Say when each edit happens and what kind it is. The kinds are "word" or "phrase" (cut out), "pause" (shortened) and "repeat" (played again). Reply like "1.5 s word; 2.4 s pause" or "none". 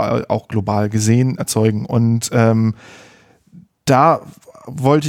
1.4 s word